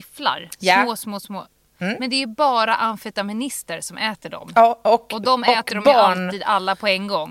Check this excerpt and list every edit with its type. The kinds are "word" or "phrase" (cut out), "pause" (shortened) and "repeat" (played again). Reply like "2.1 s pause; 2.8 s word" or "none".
none